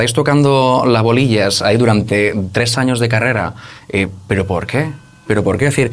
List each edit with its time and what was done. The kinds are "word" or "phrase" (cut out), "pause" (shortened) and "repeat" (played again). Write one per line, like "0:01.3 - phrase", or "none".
none